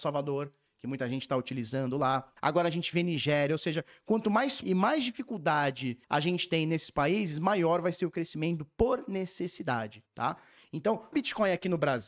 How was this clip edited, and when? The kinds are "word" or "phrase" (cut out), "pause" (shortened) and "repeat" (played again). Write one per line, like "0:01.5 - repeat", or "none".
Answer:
0:02.4 - pause
0:04.6 - word
0:06.0 - pause
0:10.1 - pause
0:11.1 - word